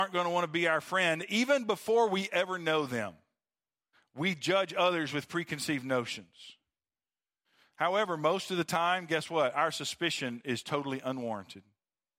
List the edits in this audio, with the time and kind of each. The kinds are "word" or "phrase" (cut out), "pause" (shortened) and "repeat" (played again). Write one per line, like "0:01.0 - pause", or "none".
none